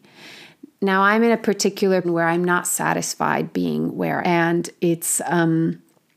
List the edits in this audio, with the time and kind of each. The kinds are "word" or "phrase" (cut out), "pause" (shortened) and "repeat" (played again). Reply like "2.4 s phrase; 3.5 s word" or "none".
2.0 s word; 4.2 s phrase